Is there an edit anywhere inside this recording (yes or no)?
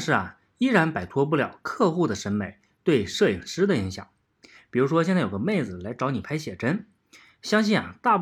no